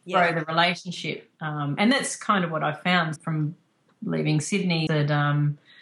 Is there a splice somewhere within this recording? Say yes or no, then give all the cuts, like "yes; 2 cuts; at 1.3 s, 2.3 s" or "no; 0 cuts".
yes; 2 cuts; at 3.2 s, 4.9 s